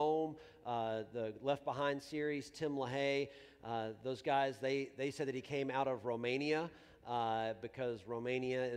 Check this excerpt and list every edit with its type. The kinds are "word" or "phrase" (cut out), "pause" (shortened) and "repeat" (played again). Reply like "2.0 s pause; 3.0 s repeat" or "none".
none